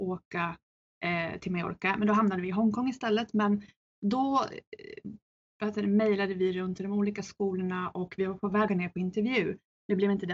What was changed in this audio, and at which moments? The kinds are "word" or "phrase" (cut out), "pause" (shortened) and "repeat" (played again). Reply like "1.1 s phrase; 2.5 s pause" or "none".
8.7 s word